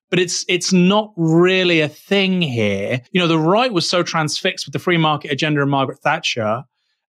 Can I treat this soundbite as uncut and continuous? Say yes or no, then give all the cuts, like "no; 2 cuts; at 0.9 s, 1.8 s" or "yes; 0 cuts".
no; 1 cut; at 3.1 s